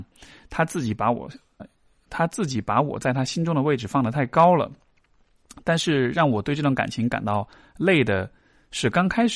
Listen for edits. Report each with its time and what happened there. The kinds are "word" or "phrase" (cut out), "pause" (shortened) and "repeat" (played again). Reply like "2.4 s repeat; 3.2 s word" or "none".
1.6 s word